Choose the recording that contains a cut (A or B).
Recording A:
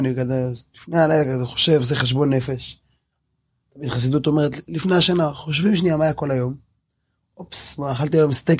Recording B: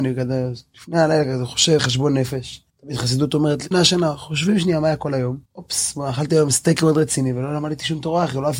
B